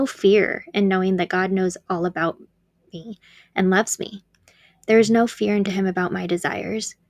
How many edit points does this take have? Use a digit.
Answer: 1